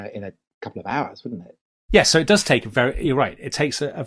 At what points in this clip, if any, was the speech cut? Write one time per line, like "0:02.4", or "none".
none